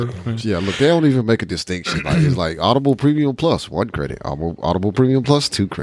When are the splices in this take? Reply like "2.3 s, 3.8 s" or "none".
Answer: none